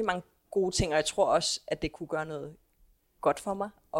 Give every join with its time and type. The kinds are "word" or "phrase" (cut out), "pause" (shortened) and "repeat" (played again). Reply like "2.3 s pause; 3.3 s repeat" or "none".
none